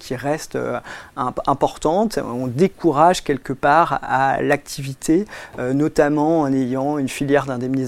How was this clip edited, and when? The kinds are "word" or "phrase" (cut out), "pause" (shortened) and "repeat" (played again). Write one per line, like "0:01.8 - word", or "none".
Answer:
none